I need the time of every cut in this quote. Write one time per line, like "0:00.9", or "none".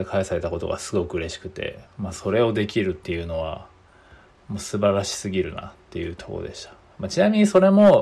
0:01.9